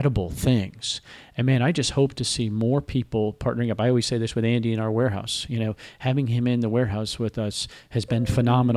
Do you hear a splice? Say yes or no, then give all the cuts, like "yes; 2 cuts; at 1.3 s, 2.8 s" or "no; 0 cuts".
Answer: no; 0 cuts